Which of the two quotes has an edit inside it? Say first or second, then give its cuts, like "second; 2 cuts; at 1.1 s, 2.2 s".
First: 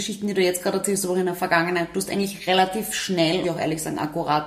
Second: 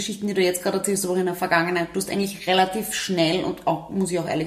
first; 1 cut; at 3.4 s